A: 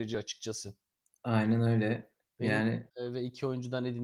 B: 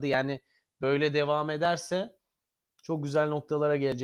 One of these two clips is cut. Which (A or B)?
A